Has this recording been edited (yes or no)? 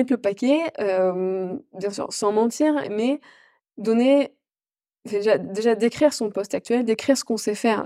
no